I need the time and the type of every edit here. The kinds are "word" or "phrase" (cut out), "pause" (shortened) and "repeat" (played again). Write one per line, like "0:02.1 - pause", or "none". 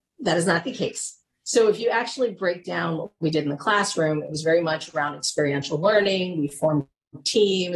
none